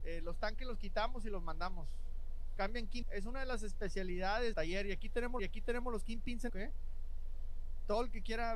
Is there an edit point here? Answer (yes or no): yes